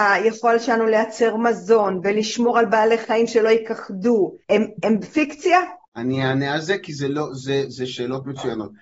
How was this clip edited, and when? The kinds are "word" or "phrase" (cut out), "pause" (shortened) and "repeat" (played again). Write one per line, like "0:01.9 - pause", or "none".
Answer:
0:04.4 - pause
0:05.8 - pause